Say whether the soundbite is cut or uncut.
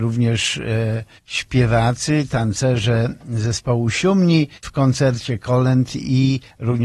cut